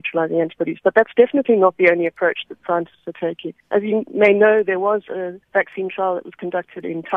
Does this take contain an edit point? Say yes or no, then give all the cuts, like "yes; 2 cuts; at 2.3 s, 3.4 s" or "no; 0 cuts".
yes; 2 cuts; at 3.6 s, 5.4 s